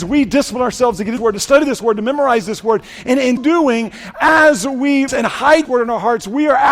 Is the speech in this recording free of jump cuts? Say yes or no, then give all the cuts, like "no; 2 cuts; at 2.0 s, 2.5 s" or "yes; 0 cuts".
no; 4 cuts; at 1.2 s, 3.4 s, 5.1 s, 5.6 s